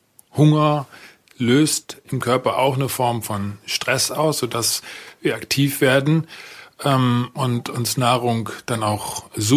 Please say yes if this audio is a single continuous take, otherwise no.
yes